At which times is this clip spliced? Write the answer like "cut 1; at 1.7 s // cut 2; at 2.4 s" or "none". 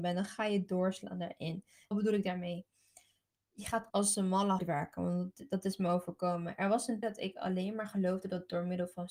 cut 1; at 1.9 s // cut 2; at 3.9 s // cut 3; at 4.6 s // cut 4; at 7.0 s